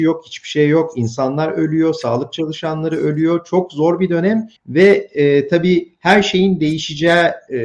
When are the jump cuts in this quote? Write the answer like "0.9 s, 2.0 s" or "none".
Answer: 4.6 s